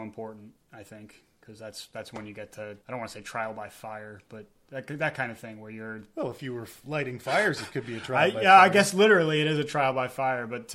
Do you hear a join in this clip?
yes; 1 cut; at 2.8 s

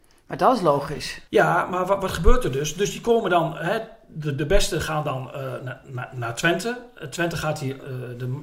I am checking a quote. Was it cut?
yes; 1 cut; at 1.3 s

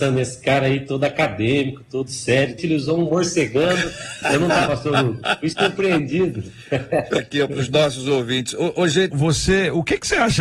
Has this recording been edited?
yes; 4 cuts; at 2.6 s, 4.7 s, 7.2 s, 9.1 s

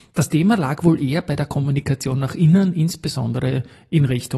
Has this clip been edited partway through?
no; 0 cuts

